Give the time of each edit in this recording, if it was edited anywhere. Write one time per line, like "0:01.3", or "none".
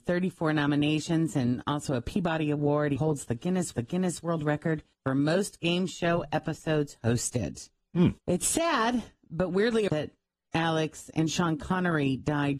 0:03.0
0:03.7
0:04.9
0:08.2
0:09.9